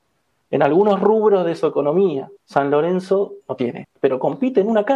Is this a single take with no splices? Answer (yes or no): no